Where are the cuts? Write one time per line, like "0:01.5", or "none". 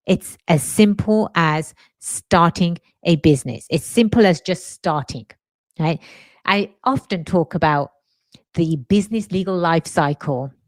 none